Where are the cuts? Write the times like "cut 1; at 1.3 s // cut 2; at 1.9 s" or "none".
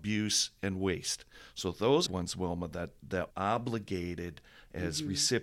cut 1; at 2.1 s // cut 2; at 3.3 s

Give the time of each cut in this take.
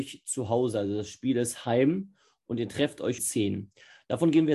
cut 1; at 3.2 s

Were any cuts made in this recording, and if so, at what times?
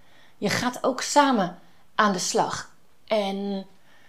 none

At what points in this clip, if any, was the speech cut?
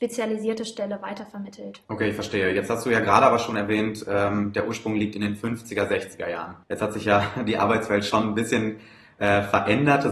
cut 1; at 1.8 s // cut 2; at 6.6 s

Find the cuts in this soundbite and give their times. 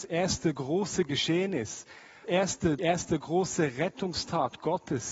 cut 1; at 2.2 s // cut 2; at 2.8 s

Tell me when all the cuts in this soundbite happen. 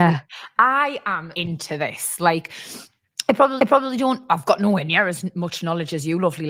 cut 1; at 1.3 s // cut 2; at 3.6 s

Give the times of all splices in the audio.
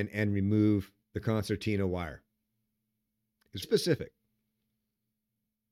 cut 1; at 1.0 s // cut 2; at 3.6 s

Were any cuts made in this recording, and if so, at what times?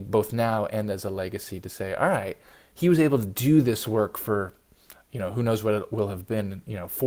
none

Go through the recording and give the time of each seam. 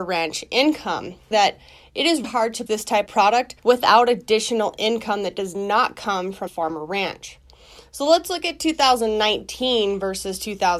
cut 1; at 1.3 s // cut 2; at 2.2 s // cut 3; at 2.7 s // cut 4; at 3.1 s // cut 5; at 3.6 s // cut 6; at 6.5 s

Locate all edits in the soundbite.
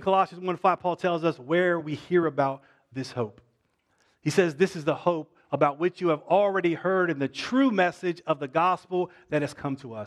none

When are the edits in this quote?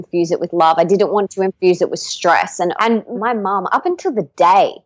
cut 1; at 2.8 s // cut 2; at 3.1 s

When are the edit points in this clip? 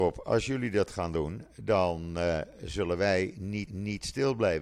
cut 1; at 3.7 s

